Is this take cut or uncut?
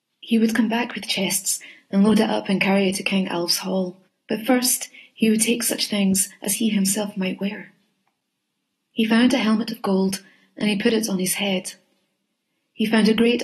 cut